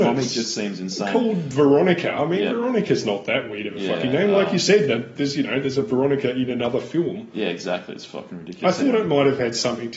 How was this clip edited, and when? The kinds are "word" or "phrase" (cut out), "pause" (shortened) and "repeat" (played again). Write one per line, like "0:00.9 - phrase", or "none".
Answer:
none